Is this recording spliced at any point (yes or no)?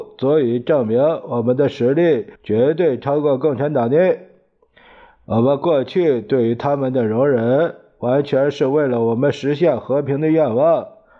yes